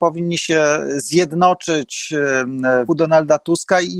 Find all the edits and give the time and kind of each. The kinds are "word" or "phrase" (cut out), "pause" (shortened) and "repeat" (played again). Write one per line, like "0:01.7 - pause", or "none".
0:02.9 - word

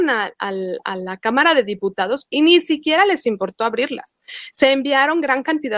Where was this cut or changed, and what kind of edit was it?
none

